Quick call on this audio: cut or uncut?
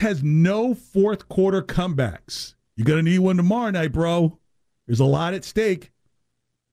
uncut